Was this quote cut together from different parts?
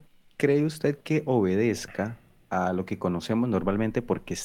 no; 0 cuts

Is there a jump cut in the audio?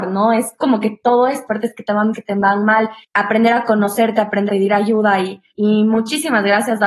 yes; 5 cuts; at 1.5 s, 2.1 s, 3.0 s, 4.5 s, 5.5 s

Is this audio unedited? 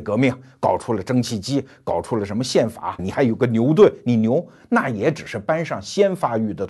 no; 1 cut; at 3.0 s

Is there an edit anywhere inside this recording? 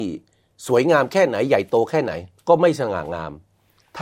yes; 1 cut; at 2.4 s

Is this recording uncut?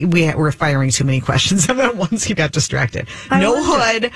no; 2 cuts; at 1.6 s, 2.4 s

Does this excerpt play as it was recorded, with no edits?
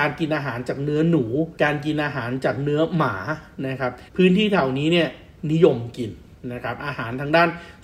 no; 2 cuts; at 1.6 s, 4.1 s

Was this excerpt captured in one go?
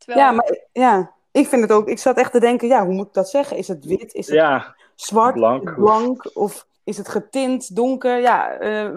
no; 1 cut; at 6.8 s

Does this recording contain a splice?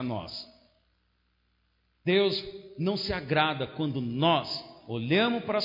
no; 0 cuts

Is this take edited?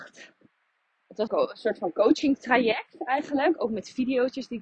yes; 1 cut; at 1.3 s

